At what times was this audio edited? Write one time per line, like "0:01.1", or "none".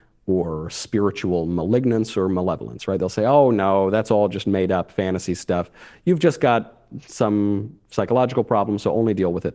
none